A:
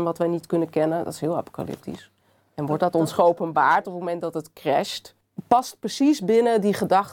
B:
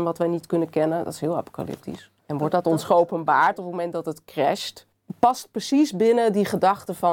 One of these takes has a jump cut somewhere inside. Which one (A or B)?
B